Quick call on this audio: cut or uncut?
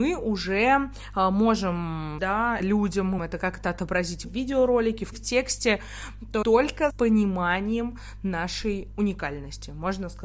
cut